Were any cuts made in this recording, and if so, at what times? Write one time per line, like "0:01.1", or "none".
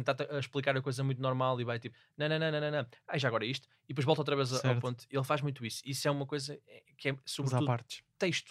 none